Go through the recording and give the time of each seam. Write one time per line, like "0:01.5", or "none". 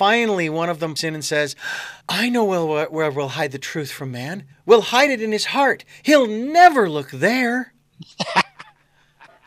0:01.0
0:02.0
0:04.5